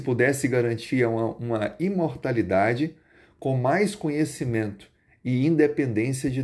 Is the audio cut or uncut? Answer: uncut